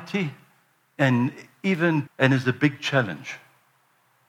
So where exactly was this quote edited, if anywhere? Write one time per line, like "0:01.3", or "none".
0:02.1

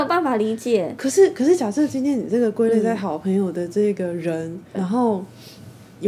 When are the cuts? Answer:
0:04.7

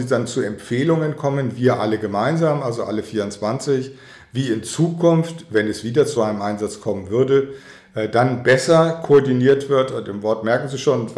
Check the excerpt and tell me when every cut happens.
0:06.2

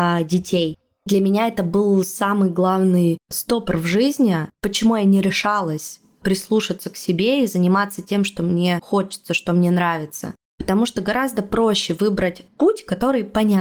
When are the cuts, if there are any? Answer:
0:04.5

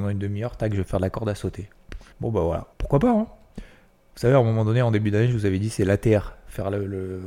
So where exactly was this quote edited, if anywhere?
0:02.1
0:02.7

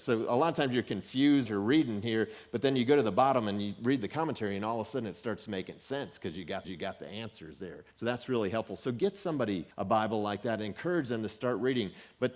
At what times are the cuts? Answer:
0:01.5
0:06.6
0:07.9
0:09.7

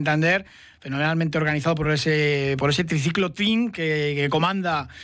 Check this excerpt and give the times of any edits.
none

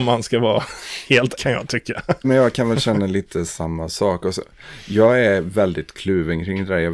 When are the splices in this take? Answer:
0:01.4
0:02.2

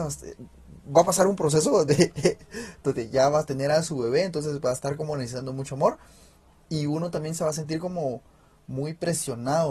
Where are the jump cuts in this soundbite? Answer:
none

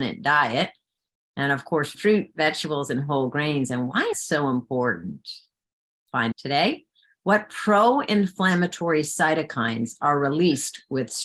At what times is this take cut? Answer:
0:01.9
0:04.1
0:06.3

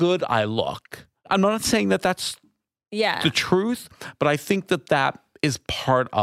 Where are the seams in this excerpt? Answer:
none

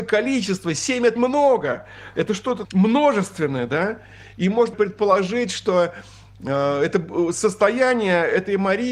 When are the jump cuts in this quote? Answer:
0:01.2
0:02.6
0:04.7

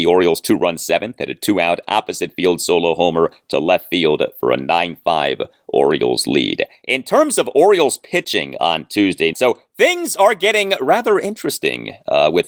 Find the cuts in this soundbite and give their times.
0:09.3

